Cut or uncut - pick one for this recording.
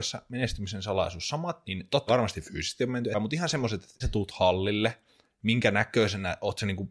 cut